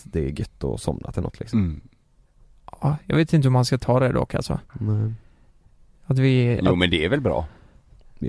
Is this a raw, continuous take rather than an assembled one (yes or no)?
yes